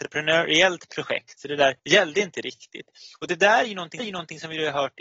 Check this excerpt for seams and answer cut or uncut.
cut